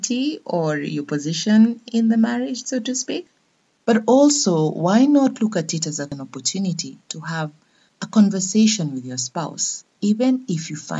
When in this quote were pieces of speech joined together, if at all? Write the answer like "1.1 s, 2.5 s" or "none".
none

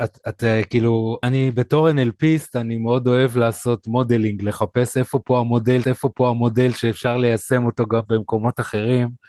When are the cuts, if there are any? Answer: 1.2 s, 5.8 s

